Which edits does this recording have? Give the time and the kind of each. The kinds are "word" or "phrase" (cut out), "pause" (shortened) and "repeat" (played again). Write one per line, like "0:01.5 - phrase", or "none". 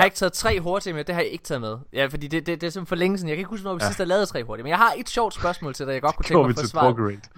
none